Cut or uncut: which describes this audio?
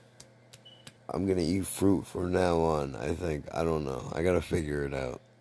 cut